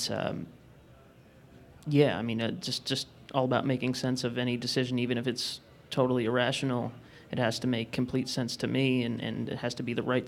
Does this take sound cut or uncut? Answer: uncut